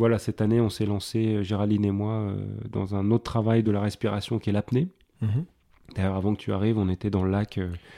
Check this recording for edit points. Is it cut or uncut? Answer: uncut